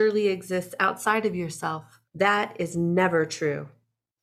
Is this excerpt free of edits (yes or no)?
no